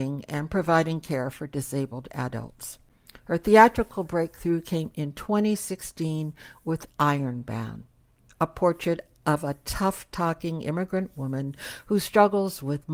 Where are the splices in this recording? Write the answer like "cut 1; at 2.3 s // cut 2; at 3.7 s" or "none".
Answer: none

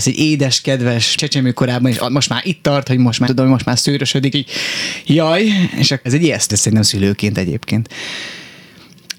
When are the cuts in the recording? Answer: cut 1; at 1.2 s // cut 2; at 3.3 s // cut 3; at 4.3 s // cut 4; at 6.1 s // cut 5; at 6.5 s

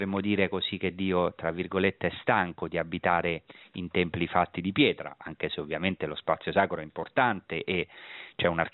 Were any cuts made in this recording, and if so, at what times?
none

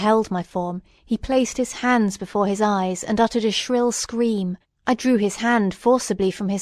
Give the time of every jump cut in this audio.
cut 1; at 4.6 s

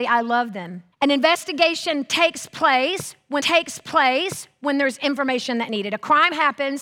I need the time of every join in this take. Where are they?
cut 1; at 0.9 s // cut 2; at 3.4 s

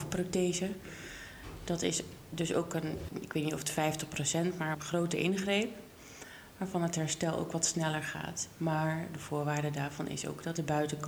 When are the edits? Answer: cut 1; at 3.1 s // cut 2; at 4.7 s

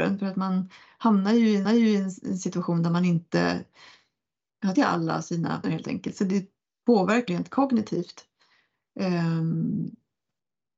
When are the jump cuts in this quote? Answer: cut 1; at 1.6 s // cut 2; at 4.7 s // cut 3; at 5.6 s // cut 4; at 7.3 s

